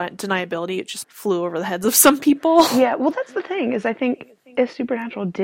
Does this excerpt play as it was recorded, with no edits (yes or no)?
no